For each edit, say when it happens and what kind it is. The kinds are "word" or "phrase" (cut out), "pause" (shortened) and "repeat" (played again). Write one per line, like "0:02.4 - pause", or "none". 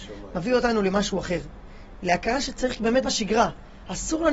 0:03.0 - word